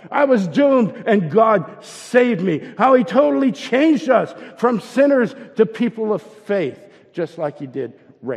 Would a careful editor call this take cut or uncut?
uncut